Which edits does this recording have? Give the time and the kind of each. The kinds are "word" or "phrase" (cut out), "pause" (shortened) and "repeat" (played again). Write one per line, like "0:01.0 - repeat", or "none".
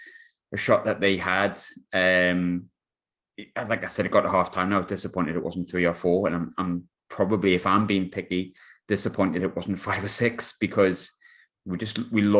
none